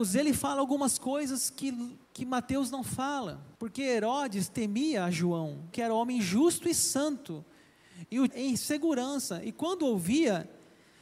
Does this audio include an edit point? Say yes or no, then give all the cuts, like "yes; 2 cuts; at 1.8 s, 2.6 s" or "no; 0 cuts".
yes; 4 cuts; at 2.0 s, 3.5 s, 5.7 s, 8.3 s